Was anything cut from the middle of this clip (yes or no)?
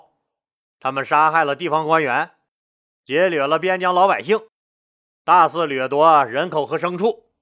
no